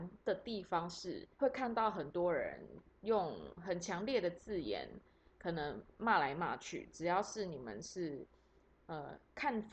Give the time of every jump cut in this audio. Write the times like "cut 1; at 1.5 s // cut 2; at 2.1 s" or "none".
cut 1; at 1.3 s